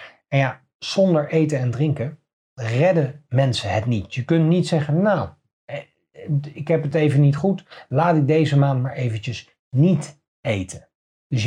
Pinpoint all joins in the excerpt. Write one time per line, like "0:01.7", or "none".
none